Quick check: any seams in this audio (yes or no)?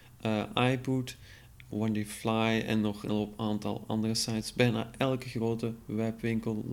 yes